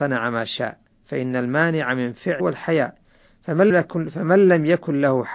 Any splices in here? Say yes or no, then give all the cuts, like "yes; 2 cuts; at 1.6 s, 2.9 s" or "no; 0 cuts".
yes; 3 cuts; at 0.9 s, 2.4 s, 3.7 s